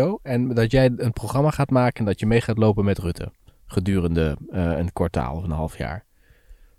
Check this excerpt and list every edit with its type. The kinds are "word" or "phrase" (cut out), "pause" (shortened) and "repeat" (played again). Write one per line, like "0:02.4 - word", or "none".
none